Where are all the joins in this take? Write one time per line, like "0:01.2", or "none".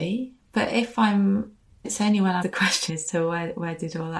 0:01.8
0:02.4
0:02.9